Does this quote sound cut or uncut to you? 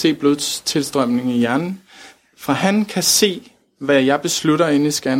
uncut